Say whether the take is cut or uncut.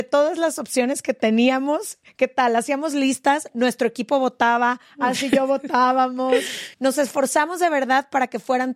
cut